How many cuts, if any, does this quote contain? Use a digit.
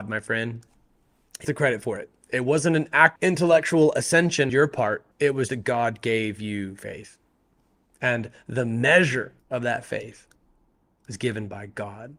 6